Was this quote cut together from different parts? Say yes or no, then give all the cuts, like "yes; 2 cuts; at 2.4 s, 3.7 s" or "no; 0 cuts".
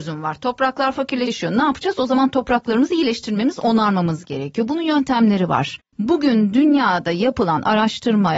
no; 0 cuts